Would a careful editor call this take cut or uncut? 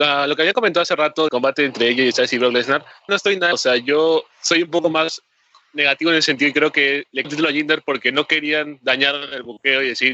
cut